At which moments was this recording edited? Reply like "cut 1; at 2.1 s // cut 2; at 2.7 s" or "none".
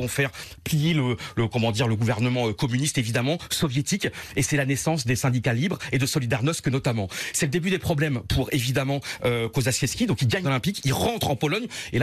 cut 1; at 10.4 s